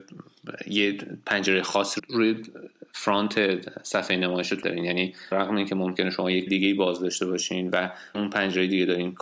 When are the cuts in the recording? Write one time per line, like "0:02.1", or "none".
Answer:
0:02.0
0:04.6
0:05.3
0:06.5
0:08.1